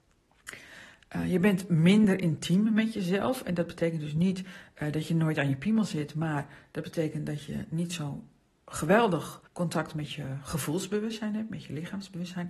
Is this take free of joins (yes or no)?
no